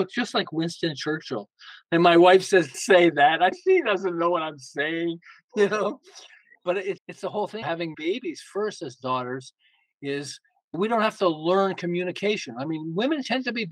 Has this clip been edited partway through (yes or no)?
yes